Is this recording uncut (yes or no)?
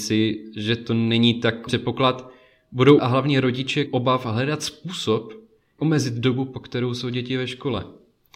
no